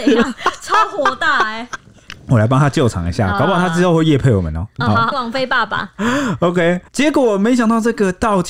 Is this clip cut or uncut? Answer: cut